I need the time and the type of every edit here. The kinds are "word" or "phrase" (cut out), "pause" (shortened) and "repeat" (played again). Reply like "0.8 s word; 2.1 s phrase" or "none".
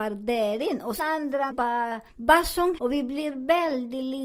1.0 s word; 1.5 s phrase; 2.1 s pause; 2.8 s word